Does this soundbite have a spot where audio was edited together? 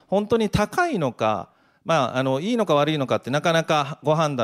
no; 0 cuts

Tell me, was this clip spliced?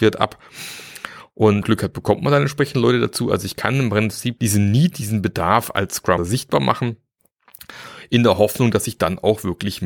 yes; 3 cuts; at 1.6 s, 4.4 s, 6.2 s

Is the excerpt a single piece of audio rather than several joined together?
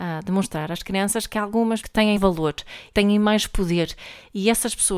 no; 3 cuts; at 1.8 s, 2.2 s, 2.9 s

